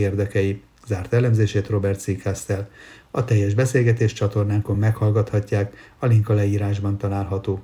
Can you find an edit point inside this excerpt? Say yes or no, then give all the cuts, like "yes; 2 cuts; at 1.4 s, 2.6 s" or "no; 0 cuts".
no; 0 cuts